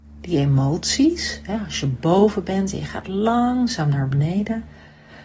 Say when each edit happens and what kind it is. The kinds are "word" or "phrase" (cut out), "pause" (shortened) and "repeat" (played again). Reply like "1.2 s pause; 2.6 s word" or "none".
none